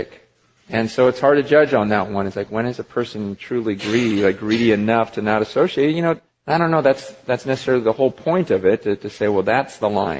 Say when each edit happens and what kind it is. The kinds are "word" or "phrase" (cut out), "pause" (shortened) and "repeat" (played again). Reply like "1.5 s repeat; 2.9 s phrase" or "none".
6.3 s pause